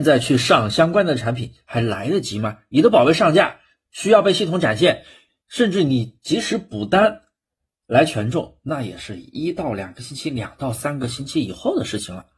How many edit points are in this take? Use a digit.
0